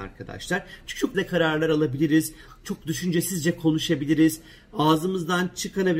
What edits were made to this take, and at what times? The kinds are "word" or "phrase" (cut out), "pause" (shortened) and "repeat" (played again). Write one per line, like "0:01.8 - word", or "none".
0:01.1 - word